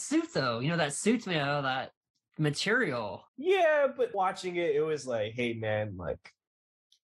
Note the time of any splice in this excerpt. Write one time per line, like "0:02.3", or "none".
0:03.3
0:04.1